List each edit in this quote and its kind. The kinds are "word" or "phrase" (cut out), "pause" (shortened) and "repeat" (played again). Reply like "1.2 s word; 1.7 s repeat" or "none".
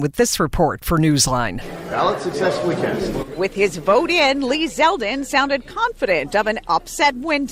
none